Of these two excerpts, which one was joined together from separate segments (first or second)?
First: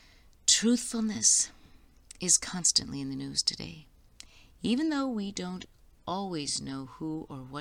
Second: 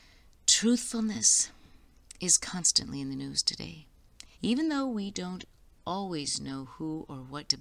second